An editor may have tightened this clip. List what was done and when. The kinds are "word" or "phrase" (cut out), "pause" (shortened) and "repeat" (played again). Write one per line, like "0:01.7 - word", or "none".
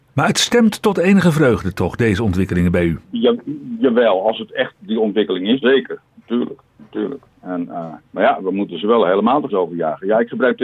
0:05.6 - word
0:08.0 - pause
0:09.5 - word